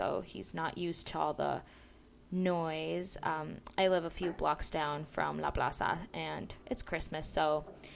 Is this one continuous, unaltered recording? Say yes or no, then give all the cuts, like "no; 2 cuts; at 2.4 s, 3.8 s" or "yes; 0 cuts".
yes; 0 cuts